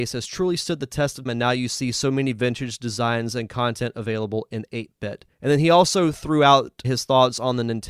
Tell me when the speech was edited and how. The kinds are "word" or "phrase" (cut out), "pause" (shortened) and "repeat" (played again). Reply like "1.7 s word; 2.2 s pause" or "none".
1.3 s word; 5.3 s pause; 6.8 s word